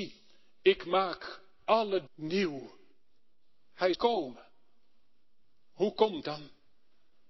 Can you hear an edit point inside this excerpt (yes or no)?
yes